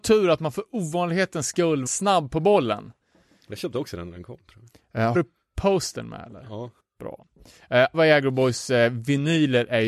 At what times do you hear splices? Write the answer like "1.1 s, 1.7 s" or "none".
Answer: 1.9 s, 5.1 s, 6.8 s, 7.9 s